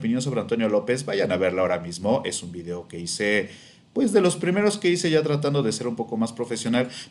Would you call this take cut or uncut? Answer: uncut